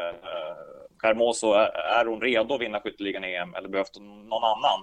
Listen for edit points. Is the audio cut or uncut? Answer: uncut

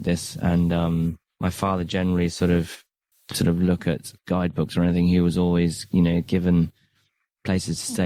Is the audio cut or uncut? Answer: cut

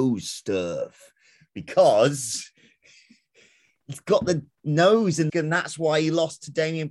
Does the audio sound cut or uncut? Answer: cut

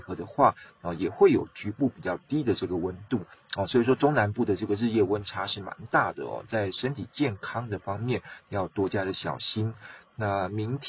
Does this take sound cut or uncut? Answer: uncut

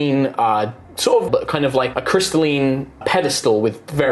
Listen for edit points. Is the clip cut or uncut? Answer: cut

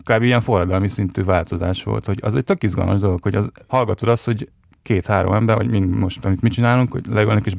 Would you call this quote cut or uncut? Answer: uncut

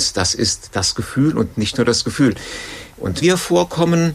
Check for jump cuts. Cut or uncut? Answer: cut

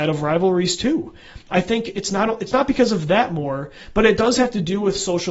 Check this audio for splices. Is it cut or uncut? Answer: uncut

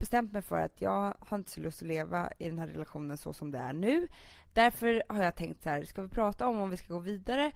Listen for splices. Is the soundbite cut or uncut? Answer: uncut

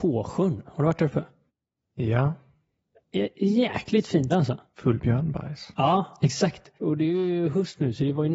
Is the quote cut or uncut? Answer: cut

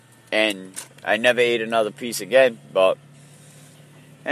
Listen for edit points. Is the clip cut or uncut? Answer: uncut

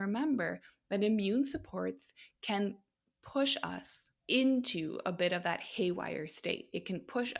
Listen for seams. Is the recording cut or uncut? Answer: cut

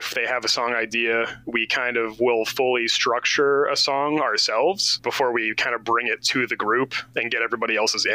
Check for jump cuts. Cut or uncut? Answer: uncut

